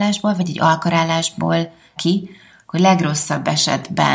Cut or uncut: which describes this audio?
cut